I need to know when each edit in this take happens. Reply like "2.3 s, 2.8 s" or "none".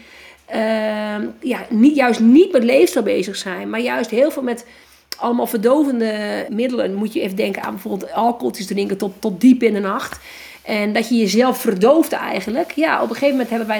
6.5 s